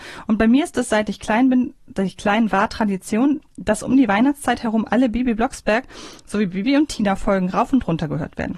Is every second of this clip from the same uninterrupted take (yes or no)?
yes